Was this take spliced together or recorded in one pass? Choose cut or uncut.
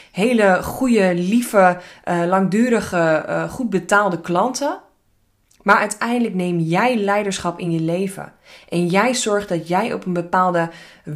uncut